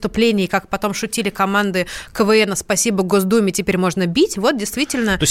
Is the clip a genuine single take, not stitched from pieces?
yes; 0 cuts

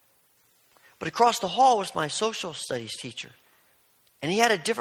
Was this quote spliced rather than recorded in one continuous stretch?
no; 0 cuts

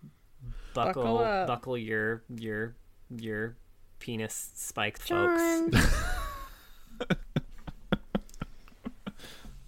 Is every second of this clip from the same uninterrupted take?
no; 2 cuts; at 3.1 s, 5.0 s

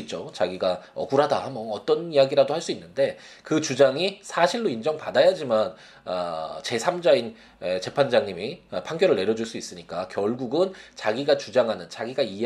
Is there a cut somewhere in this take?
no; 0 cuts

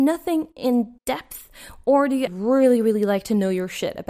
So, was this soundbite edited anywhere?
yes; 2 cuts; at 1.0 s, 2.3 s

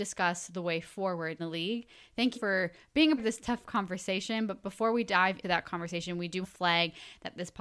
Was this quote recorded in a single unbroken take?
no; 5 cuts; at 1.4 s, 2.3 s, 3.2 s, 5.4 s, 6.4 s

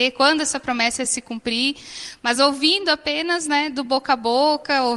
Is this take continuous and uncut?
yes; 0 cuts

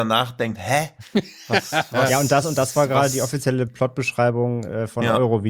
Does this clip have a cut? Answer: no; 0 cuts

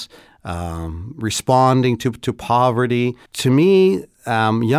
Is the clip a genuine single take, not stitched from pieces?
no; 1 cut; at 3.3 s

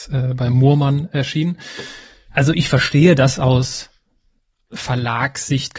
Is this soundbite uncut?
yes; 0 cuts

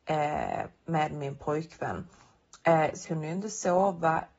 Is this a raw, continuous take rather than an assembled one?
no; 1 cut; at 3.0 s

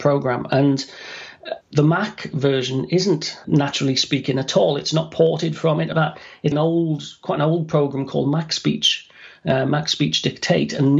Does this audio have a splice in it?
yes; 4 cuts; at 1.6 s, 3.4 s, 5.9 s, 6.5 s

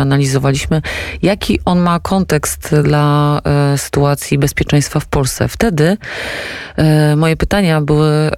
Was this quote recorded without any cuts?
yes; 0 cuts

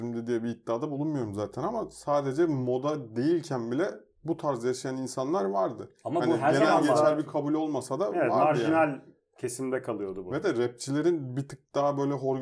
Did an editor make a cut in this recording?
no; 0 cuts

